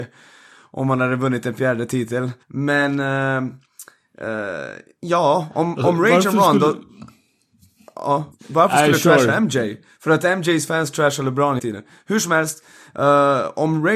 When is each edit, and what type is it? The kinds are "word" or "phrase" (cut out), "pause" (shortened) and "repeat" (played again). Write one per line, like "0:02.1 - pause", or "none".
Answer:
0:02.4 - pause
0:08.3 - word
0:11.6 - word